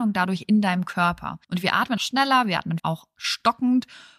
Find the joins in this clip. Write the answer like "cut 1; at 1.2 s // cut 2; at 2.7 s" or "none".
cut 1; at 1.4 s // cut 2; at 2.0 s // cut 3; at 2.8 s